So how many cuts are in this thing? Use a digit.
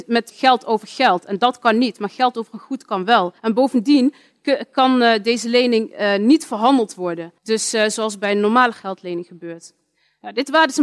2